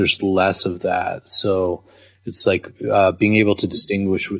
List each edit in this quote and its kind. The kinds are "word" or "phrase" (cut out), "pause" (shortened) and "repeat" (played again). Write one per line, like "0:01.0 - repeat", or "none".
none